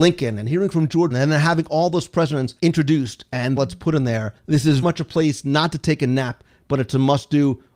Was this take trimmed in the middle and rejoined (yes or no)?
yes